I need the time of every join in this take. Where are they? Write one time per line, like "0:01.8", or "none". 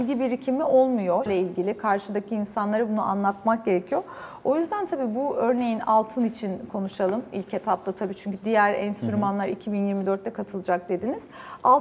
0:01.3